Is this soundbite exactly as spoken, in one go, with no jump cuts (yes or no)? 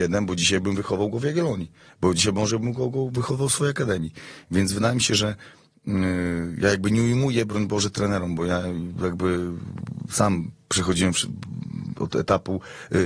yes